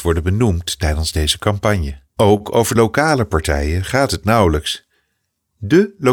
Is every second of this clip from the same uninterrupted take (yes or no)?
no